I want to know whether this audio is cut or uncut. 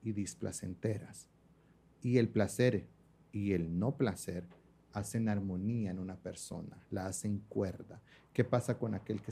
uncut